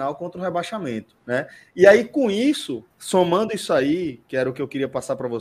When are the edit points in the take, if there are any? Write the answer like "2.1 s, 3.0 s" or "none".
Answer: 1.2 s, 2.9 s